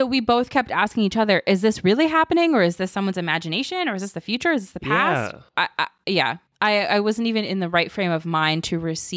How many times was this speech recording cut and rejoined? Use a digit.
1